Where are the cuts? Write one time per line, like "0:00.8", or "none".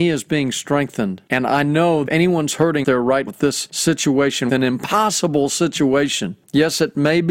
0:01.3
0:02.1
0:02.8
0:03.3
0:04.5